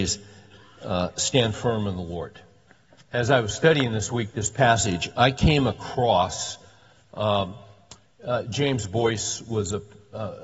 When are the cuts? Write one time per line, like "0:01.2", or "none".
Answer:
0:02.7